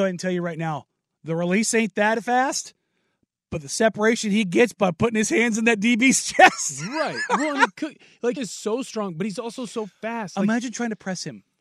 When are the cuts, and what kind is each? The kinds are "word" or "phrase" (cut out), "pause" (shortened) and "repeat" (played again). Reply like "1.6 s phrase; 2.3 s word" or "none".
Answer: 8.4 s word